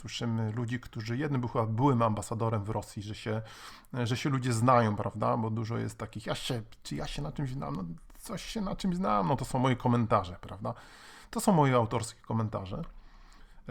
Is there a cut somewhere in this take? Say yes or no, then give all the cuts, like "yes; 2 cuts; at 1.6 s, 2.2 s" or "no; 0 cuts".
no; 0 cuts